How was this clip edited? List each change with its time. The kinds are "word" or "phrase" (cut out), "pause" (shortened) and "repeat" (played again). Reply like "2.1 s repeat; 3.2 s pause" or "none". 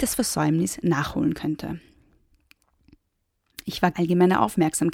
3.9 s word